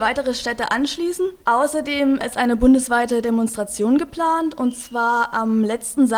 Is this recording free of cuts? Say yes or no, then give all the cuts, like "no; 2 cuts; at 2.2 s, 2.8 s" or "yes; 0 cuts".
no; 1 cut; at 1.4 s